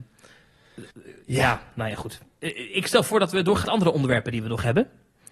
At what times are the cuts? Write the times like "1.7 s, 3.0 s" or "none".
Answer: 0.9 s, 3.6 s